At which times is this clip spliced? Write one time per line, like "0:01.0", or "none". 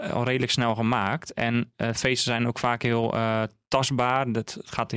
none